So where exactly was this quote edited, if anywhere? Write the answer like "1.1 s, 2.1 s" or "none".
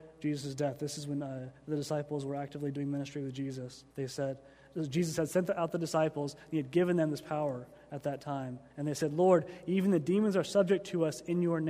3.9 s, 8.7 s